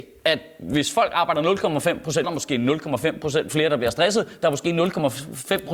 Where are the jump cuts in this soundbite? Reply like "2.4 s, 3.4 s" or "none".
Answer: 2.2 s